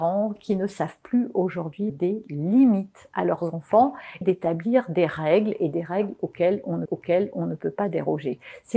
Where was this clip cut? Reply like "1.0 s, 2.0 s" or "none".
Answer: 1.9 s, 4.2 s, 6.9 s